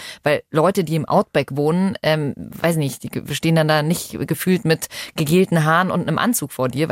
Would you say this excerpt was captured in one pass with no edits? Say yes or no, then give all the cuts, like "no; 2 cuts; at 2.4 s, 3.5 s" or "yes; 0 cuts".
yes; 0 cuts